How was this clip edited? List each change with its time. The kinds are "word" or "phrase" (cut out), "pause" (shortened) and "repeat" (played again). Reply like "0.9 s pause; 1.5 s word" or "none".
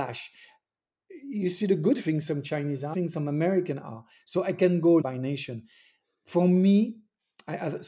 2.9 s phrase; 5.0 s word